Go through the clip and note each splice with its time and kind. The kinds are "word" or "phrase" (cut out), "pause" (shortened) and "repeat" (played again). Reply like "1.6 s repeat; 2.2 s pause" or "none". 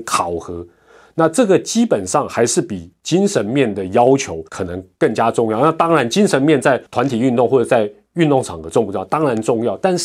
4.5 s pause; 6.9 s pause